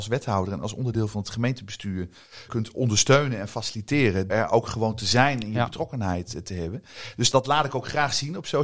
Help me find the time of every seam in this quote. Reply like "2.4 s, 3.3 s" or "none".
2.5 s, 4.3 s, 7.3 s